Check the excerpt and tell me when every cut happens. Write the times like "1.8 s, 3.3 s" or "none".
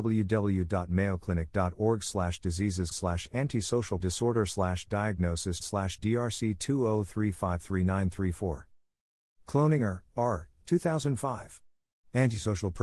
2.9 s, 4.0 s, 5.6 s

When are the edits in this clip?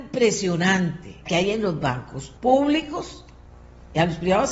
1.3 s, 2.4 s

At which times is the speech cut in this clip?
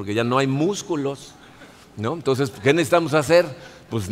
none

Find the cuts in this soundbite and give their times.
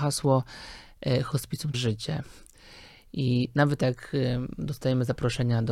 1.7 s

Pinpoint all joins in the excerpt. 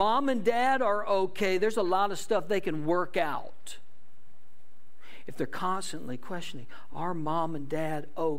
none

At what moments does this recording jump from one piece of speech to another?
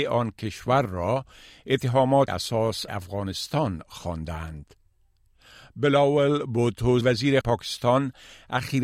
2.3 s, 2.9 s, 7.0 s, 7.4 s

